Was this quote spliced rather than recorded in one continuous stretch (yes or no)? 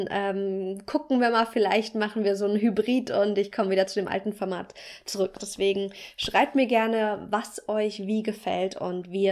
no